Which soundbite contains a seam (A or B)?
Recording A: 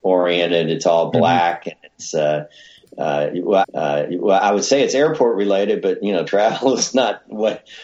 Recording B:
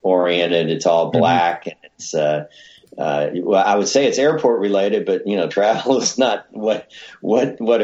A